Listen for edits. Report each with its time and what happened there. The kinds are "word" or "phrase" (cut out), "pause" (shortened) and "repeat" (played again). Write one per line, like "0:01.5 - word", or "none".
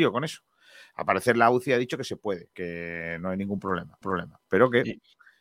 0:02.5 - word
0:04.0 - repeat